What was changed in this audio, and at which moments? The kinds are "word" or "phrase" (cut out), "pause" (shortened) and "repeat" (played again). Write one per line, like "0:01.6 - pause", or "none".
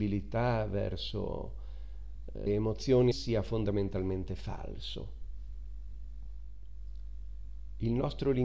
0:02.5 - word
0:03.1 - word